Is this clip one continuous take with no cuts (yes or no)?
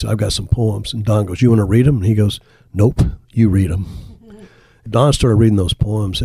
yes